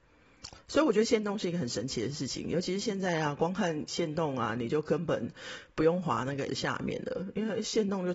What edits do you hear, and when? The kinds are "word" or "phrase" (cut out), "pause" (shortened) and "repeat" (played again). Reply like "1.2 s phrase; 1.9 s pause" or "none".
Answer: 6.5 s word